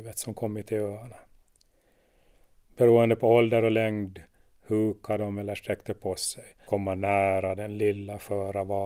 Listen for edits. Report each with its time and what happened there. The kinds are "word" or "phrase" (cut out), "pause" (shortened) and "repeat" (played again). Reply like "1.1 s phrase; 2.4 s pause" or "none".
6.7 s phrase